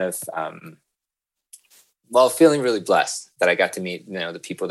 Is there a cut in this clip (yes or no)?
no